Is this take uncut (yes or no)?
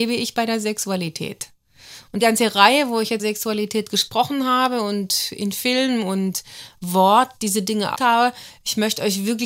no